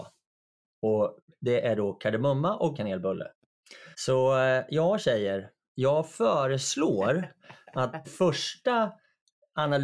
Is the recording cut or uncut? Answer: cut